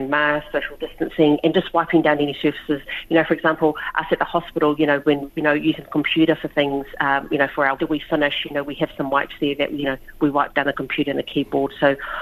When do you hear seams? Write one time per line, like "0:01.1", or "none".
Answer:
0:05.3
0:07.8

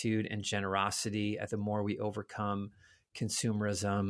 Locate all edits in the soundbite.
0:01.5

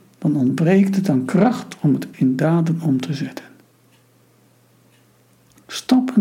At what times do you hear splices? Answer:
0:02.1

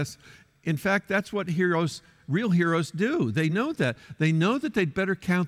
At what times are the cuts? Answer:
none

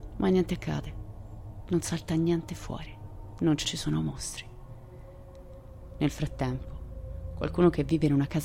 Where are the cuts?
0:03.6

